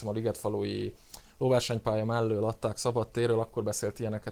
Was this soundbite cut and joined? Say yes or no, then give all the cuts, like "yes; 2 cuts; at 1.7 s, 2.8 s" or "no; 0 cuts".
no; 0 cuts